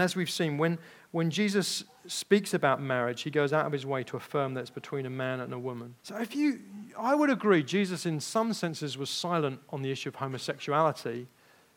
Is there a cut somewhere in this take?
yes; 1 cut; at 6.0 s

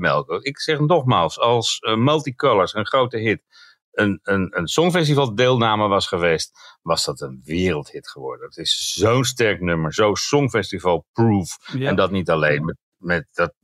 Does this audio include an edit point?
no; 0 cuts

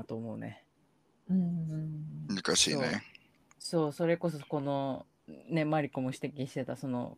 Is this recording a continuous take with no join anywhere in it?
yes; 0 cuts

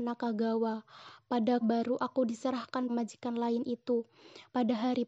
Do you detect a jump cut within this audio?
yes; 2 cuts; at 1.6 s, 2.9 s

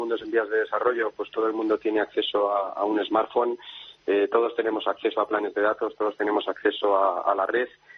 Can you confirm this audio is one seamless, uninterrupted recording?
yes; 0 cuts

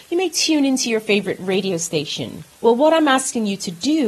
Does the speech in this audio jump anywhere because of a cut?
yes; 1 cut; at 2.5 s

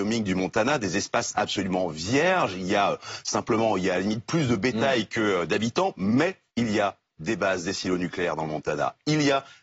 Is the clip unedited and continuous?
no; 1 cut; at 6.5 s

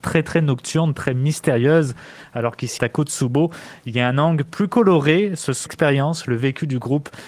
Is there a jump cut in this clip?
yes; 2 cuts; at 2.8 s, 5.7 s

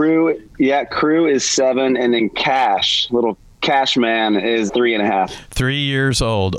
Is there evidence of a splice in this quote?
yes; 1 cut; at 4.7 s

